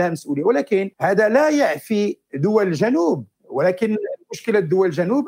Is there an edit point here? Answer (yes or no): yes